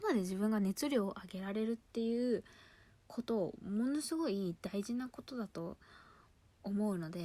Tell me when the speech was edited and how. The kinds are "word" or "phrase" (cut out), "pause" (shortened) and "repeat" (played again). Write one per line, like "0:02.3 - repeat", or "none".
none

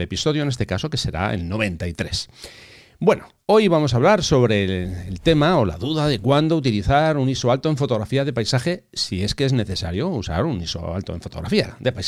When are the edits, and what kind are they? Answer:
none

